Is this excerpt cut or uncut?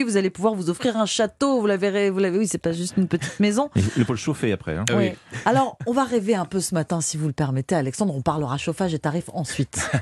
cut